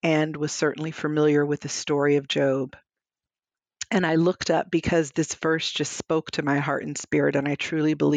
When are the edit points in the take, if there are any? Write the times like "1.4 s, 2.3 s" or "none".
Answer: none